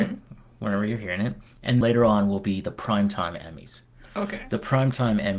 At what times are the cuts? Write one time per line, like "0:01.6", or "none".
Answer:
0:01.8